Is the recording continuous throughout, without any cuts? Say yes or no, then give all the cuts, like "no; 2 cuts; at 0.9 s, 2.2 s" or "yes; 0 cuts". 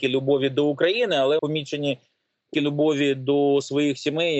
no; 2 cuts; at 1.4 s, 2.5 s